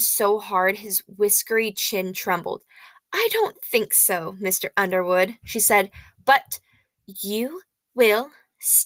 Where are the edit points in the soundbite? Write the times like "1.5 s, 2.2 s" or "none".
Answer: none